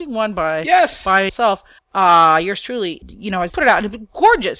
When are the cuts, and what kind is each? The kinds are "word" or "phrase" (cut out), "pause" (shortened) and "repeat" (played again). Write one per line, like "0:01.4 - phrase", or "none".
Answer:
0:01.3 - phrase
0:01.8 - pause
0:03.0 - word
0:03.5 - word

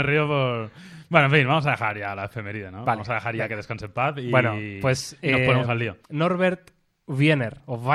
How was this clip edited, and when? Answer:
0:06.0 - pause

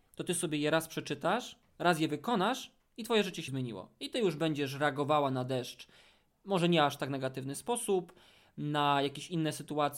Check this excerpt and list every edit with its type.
0:03.5 - word

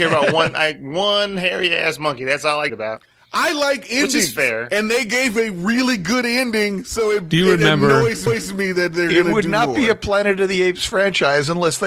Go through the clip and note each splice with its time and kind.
0:02.7 - phrase
0:08.3 - repeat

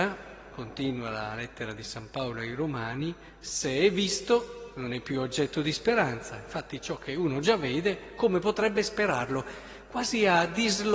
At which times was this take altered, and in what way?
none

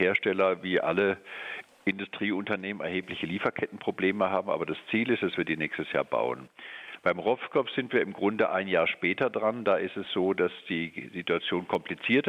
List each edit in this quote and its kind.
none

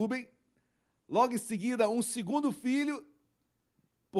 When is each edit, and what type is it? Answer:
none

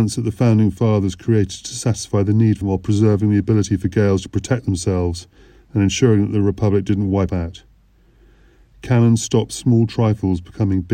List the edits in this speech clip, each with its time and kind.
0:02.6 - phrase
0:07.3 - word

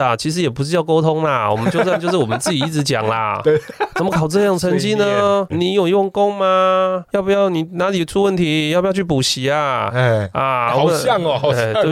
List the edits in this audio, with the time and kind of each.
0:05.5 - word
0:07.1 - pause

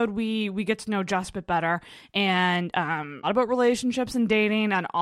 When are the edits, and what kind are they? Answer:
0:03.2 - phrase

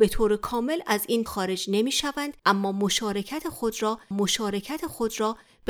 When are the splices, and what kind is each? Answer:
0:01.3 - word
0:02.4 - pause
0:04.1 - repeat

